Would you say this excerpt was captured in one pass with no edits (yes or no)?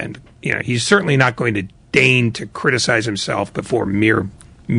yes